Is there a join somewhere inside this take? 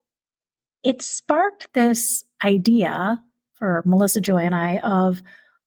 no; 0 cuts

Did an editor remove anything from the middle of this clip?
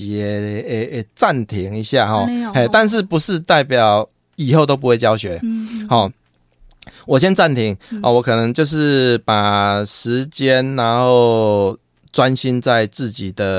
no; 0 cuts

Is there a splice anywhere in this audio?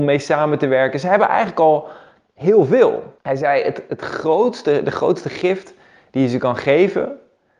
yes; 1 cut; at 3.2 s

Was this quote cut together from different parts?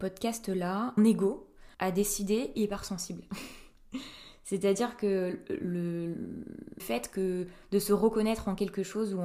yes; 4 cuts; at 1.0 s, 1.7 s, 2.5 s, 6.8 s

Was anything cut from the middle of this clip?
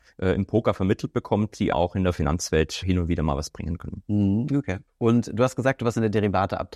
yes; 3 cuts; at 1.7 s, 2.8 s, 4.9 s

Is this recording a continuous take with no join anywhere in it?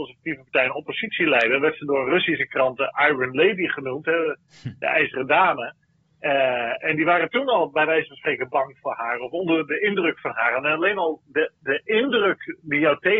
yes; 0 cuts

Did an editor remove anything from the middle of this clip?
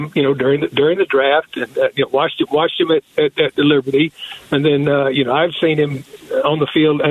no; 0 cuts

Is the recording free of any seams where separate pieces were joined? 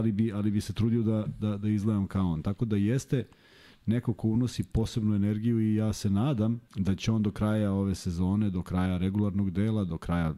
no; 1 cut; at 6.7 s

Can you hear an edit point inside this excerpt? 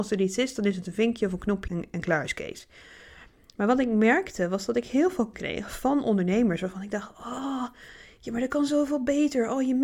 yes; 2 cuts; at 1.7 s, 5.3 s

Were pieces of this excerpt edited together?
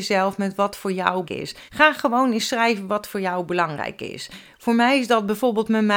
yes; 2 cuts; at 1.2 s, 1.7 s

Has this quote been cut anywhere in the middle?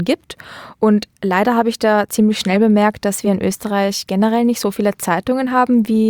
no; 0 cuts

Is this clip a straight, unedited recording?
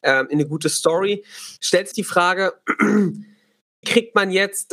no; 3 cuts; at 1.6 s, 1.9 s, 3.8 s

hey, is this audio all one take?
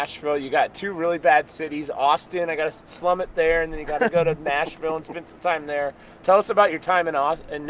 yes; 0 cuts

